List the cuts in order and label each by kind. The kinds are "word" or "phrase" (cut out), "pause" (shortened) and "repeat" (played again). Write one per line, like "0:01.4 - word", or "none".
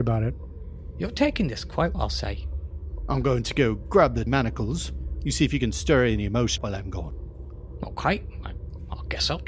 0:01.9 - word
0:04.3 - word
0:06.6 - word